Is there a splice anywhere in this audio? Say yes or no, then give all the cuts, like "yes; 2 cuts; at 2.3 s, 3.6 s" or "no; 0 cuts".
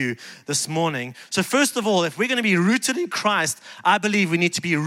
no; 0 cuts